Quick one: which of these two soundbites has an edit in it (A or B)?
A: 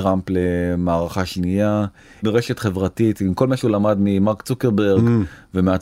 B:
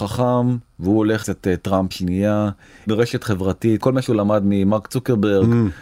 B